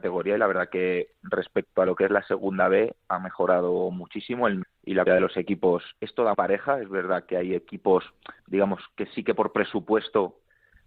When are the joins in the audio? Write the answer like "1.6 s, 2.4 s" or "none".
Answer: 4.6 s, 5.1 s, 6.0 s, 6.3 s, 8.4 s